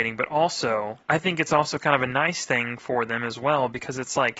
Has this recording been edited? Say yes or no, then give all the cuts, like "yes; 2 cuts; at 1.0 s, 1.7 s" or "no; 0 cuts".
yes; 1 cut; at 1.0 s